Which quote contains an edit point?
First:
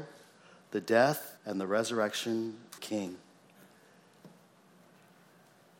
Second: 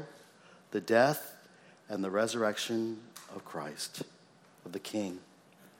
first; 2 cuts; at 1.4 s, 2.8 s

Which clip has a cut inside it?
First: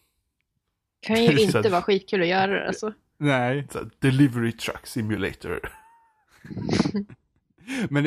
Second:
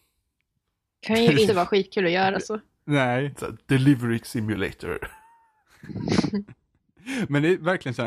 second; 3 cuts; at 1.5 s, 2.3 s, 4.2 s

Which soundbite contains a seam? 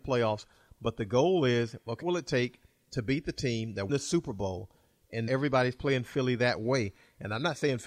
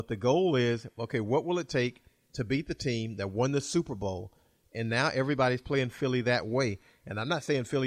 first; 3 cuts; at 2.0 s, 3.9 s, 5.3 s

